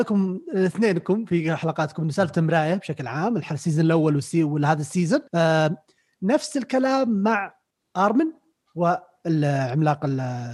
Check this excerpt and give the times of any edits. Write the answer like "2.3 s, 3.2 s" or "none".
5.3 s